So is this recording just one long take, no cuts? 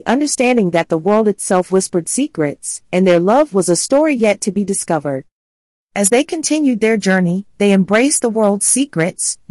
yes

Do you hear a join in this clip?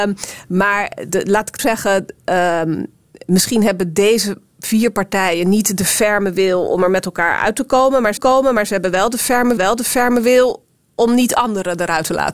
yes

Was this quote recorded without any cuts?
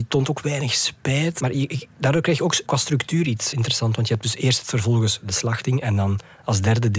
no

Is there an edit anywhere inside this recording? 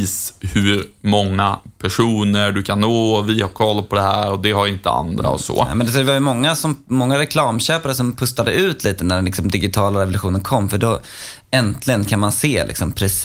no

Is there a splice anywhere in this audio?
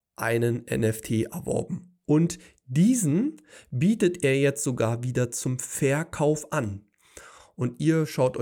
no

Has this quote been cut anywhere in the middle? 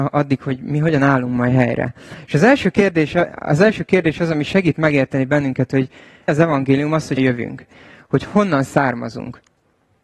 yes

